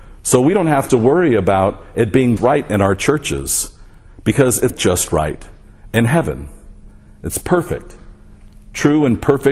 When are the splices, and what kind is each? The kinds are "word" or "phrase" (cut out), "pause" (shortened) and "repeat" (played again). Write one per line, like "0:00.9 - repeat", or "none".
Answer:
0:02.4 - word
0:04.7 - word